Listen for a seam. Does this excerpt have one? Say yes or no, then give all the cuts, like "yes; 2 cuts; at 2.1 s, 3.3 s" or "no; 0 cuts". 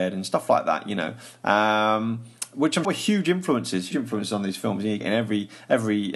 yes; 3 cuts; at 2.8 s, 3.9 s, 5.0 s